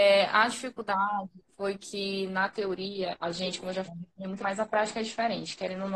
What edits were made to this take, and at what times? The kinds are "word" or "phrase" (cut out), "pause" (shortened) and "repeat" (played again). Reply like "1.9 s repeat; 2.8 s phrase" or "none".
3.8 s word; 4.4 s word